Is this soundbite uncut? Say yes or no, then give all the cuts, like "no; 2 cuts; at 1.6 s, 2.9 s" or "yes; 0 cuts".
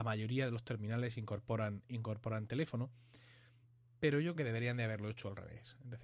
no; 1 cut; at 4.4 s